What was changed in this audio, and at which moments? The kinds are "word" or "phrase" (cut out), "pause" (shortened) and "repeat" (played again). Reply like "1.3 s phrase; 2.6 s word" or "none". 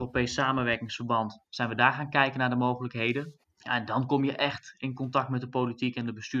1.4 s pause; 3.4 s pause